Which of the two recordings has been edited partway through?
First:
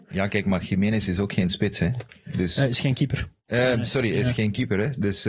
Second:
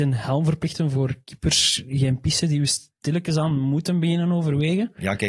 first; 1 cut; at 3.4 s

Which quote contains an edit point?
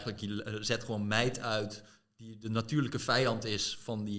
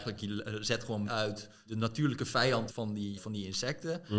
second; 4 cuts; at 1.1 s, 1.7 s, 2.7 s, 3.2 s

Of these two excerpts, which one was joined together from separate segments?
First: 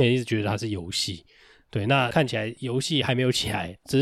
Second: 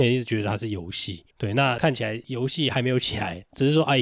second; 1 cut; at 1.3 s

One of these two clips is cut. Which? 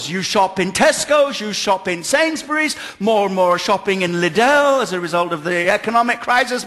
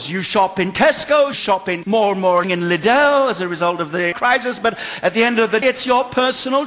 second; 5 cuts; at 1.3 s, 1.8 s, 2.4 s, 4.1 s, 5.6 s

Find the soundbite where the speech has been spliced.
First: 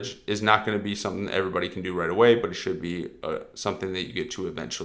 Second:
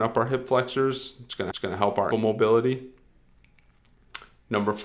second; 2 cuts; at 1.5 s, 2.1 s

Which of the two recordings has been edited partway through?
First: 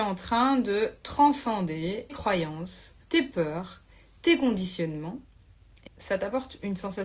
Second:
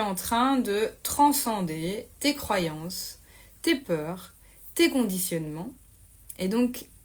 first; 3 cuts; at 2.1 s, 3.0 s, 5.9 s

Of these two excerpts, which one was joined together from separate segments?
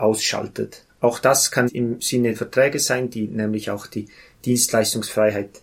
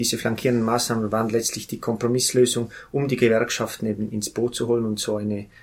first; 2 cuts; at 1.7 s, 2.3 s

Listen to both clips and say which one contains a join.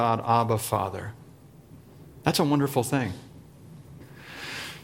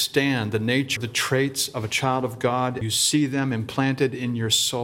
second; 2 cuts; at 1.0 s, 2.8 s

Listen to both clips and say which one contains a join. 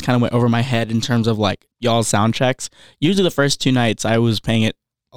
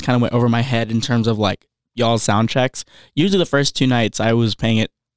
first; 1 cut; at 1.7 s

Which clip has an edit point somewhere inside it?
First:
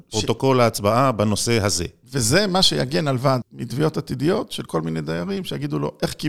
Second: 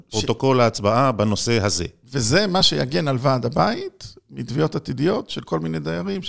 first; 1 cut; at 3.4 s

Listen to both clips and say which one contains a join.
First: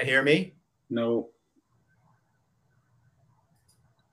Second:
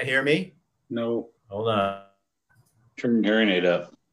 second; 1 cut; at 1.4 s

